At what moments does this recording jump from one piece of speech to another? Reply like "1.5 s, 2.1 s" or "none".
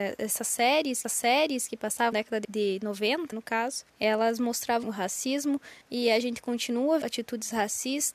1.0 s, 2.1 s, 2.4 s, 3.3 s, 3.9 s, 4.8 s, 5.8 s, 7.0 s

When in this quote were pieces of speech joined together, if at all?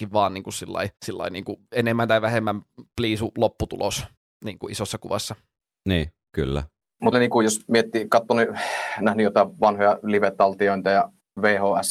1.0 s, 4.2 s, 7.1 s

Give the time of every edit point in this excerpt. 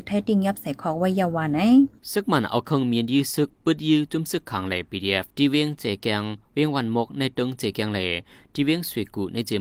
2.0 s, 5.3 s

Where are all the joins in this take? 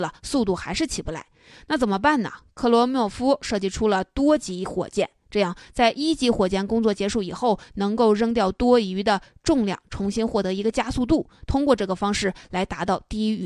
none

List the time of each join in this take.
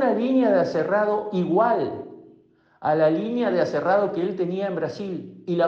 none

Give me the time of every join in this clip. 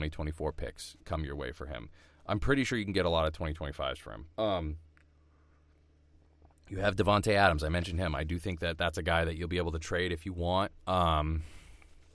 1.0 s, 4.3 s

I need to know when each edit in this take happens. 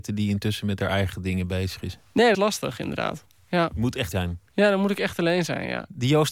2.3 s, 4.1 s

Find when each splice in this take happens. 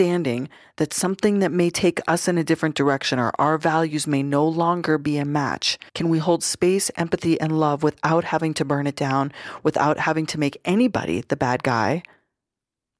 5.9 s

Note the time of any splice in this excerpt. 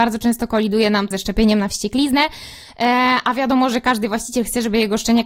1.1 s

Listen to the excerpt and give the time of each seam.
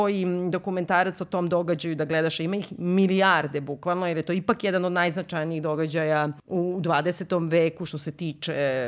6.4 s

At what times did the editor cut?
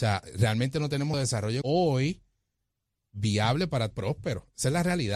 1.1 s, 1.6 s, 3.9 s

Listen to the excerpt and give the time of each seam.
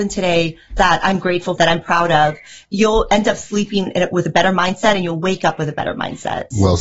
1.6 s

